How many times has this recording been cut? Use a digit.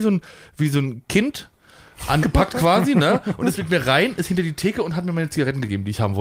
1